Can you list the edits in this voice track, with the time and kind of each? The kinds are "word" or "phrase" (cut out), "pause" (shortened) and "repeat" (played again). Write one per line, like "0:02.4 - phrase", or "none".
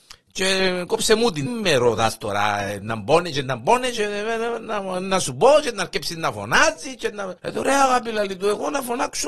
0:01.5 - word
0:07.4 - pause

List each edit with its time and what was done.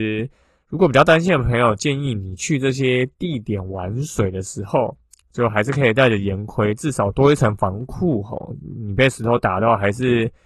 none

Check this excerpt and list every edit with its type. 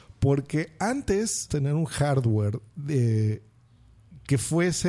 0:01.5 - word
0:02.7 - pause

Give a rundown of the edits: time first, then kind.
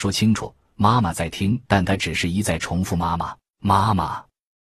0:01.7 - pause
0:03.5 - pause

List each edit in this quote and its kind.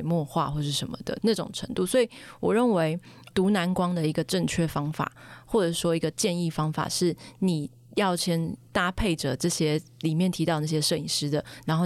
0:03.3 - word
0:08.7 - pause

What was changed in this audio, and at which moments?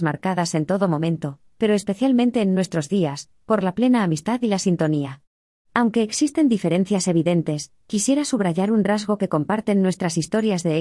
none

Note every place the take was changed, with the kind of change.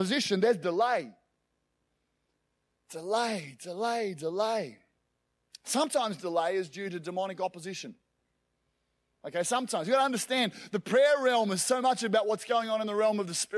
none

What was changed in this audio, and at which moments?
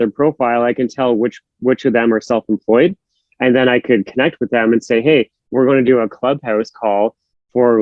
none

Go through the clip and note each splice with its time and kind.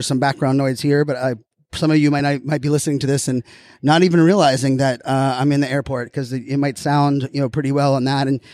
none

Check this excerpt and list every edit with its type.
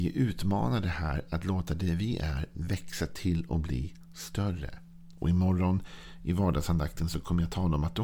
none

